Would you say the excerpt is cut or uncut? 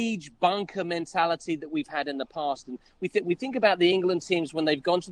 uncut